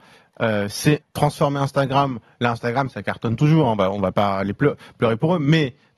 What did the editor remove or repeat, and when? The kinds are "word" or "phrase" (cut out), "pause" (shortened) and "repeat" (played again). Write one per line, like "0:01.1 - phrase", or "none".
0:01.0 - word